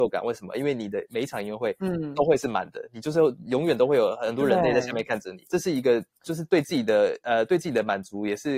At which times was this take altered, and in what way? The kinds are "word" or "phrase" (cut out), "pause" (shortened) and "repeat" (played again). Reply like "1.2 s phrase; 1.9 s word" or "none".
5.5 s pause